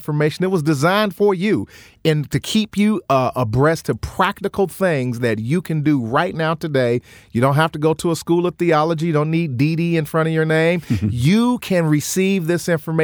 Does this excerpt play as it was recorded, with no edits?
yes; 0 cuts

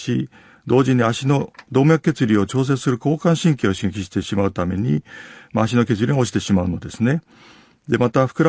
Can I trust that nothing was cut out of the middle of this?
yes; 0 cuts

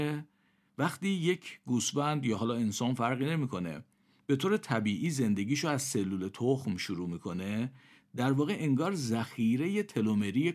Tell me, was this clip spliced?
no; 0 cuts

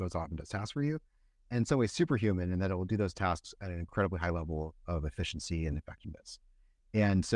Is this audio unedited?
yes; 0 cuts

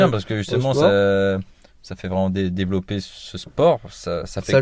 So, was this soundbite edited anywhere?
no; 0 cuts

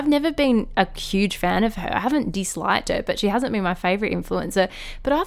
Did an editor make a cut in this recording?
no; 0 cuts

